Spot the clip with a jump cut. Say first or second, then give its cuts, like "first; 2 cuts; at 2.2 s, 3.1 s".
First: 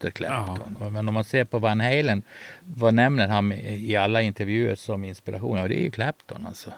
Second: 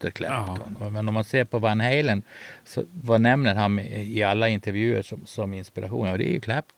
first; 2 cuts; at 2.6 s, 4.8 s